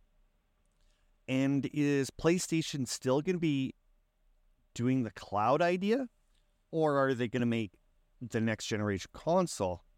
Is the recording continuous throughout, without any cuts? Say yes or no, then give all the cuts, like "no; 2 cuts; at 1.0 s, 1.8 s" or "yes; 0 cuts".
yes; 0 cuts